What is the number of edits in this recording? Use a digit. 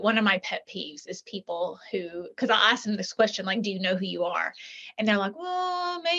0